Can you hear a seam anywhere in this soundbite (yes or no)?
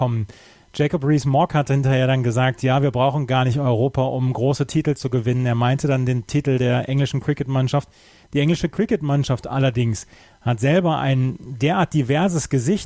no